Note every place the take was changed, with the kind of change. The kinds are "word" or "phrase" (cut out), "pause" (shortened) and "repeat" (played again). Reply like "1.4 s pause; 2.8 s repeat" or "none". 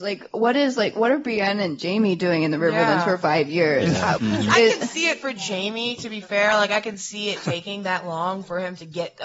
4.2 s word